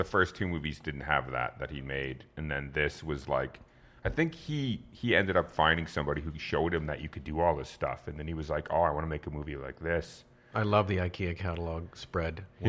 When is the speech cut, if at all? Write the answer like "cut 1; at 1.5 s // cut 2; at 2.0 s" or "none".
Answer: none

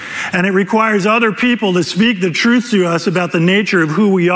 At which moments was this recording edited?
none

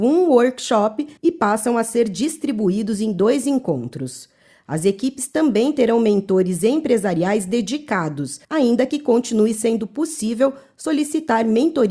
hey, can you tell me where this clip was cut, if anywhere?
cut 1; at 1.2 s // cut 2; at 8.4 s

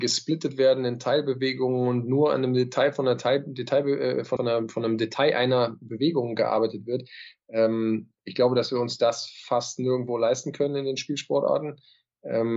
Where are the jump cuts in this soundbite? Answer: cut 1; at 4.4 s

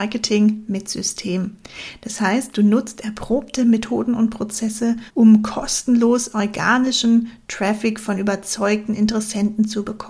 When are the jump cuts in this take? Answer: cut 1; at 5.1 s

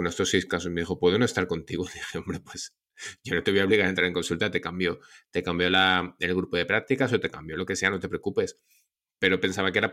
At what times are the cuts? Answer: none

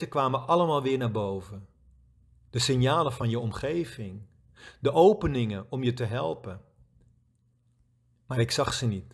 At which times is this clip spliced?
none

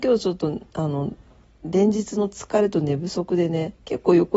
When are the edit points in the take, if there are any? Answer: none

